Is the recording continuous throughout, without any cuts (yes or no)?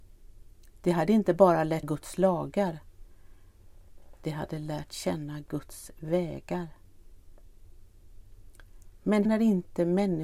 no